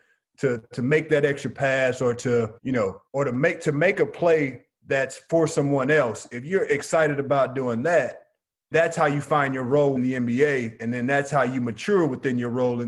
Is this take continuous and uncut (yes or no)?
no